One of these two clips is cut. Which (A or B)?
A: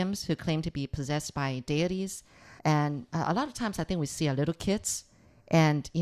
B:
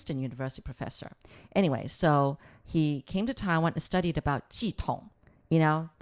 A